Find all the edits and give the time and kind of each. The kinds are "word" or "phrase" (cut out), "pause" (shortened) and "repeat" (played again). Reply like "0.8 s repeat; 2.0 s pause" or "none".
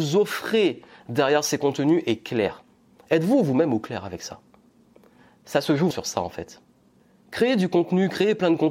5.9 s word